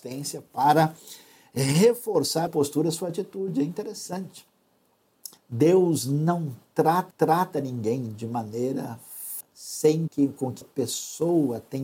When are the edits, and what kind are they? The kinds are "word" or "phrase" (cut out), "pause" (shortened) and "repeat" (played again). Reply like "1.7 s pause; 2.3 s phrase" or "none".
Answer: 2.5 s phrase; 5.4 s pause; 7.1 s repeat; 9.4 s word; 10.1 s word; 10.6 s word